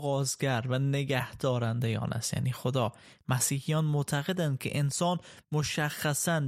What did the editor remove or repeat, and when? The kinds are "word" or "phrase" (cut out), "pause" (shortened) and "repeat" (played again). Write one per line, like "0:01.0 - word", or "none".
none